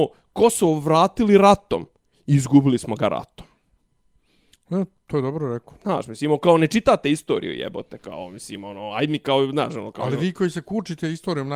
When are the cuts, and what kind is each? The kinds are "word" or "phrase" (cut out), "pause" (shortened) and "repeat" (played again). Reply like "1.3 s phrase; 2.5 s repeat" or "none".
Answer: none